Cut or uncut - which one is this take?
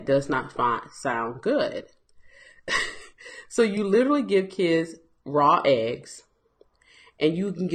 uncut